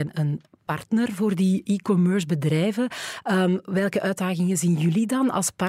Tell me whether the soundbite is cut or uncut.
uncut